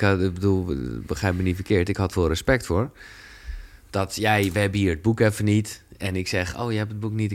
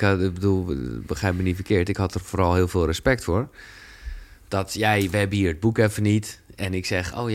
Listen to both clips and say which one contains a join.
first; 1 cut; at 2.1 s

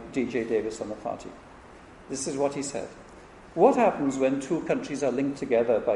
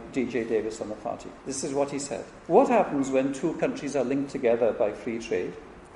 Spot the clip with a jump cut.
second; 2 cuts; at 1.4 s, 2.4 s

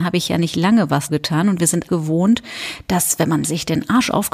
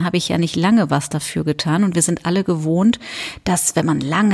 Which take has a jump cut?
first; 3 cuts; at 1.1 s, 1.9 s, 3.4 s

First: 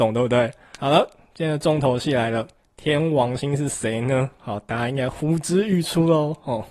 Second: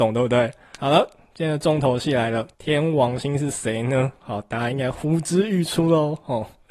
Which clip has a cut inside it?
second; 1 cut; at 2.5 s

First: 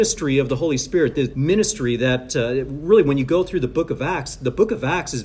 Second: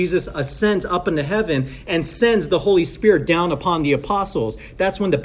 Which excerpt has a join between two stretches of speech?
first; 1 cut; at 1.3 s

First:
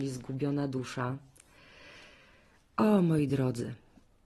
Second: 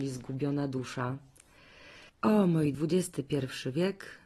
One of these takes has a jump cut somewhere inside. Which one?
second; 2 cuts; at 2.1 s, 2.7 s

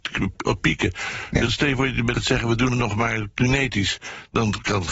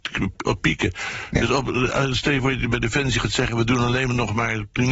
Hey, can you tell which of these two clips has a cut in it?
first; 3 cuts; at 1.5 s, 2.1 s, 2.7 s

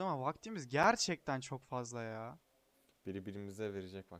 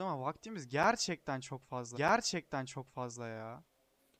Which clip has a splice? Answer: second; 1 cut; at 1.9 s

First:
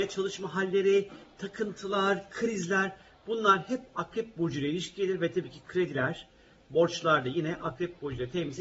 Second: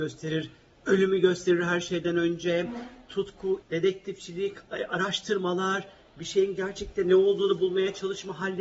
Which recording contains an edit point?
second; 1 cut; at 3.6 s

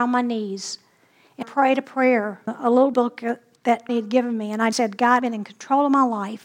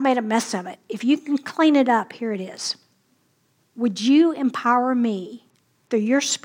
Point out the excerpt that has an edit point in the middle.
first; 6 cuts; at 1.4 s, 2.5 s, 2.9 s, 3.9 s, 4.7 s, 5.2 s

